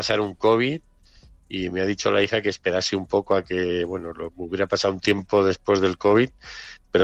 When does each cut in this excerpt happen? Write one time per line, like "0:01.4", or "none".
none